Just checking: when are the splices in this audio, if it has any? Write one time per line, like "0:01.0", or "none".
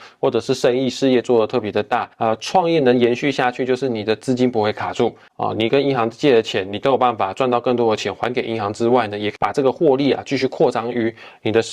0:02.1